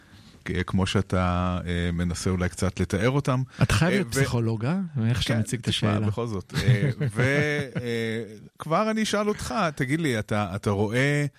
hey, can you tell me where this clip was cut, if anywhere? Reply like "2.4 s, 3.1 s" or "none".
none